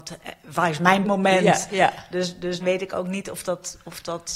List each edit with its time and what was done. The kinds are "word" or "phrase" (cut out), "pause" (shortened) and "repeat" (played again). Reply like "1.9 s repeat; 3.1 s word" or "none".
1.0 s phrase; 2.6 s word

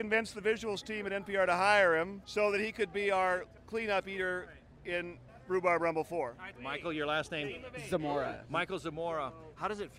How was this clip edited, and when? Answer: 2.2 s pause; 3.6 s pause; 5.3 s pause; 6.6 s word

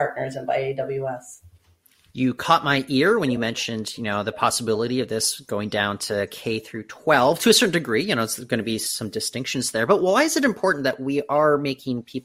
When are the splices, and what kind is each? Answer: none

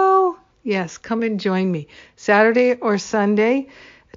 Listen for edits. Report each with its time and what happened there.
none

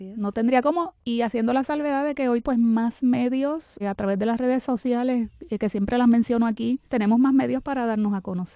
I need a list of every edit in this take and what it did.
1.0 s pause; 2.4 s word; 3.8 s word; 6.9 s pause

